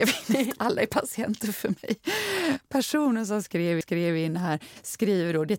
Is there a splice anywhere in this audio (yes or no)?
yes